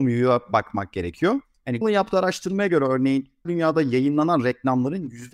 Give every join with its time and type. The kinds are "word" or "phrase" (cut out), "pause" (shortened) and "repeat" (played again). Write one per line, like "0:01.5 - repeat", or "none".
0:01.8 - word
0:03.5 - word